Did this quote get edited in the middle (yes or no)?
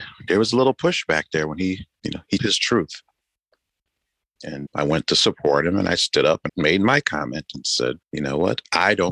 yes